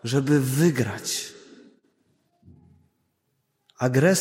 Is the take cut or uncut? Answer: uncut